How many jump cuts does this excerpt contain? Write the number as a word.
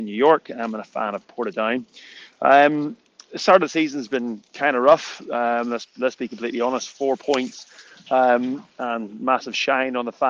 zero